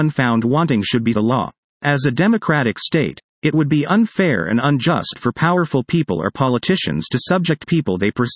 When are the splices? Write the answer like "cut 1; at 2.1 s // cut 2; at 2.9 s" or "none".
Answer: cut 1; at 1.1 s // cut 2; at 1.7 s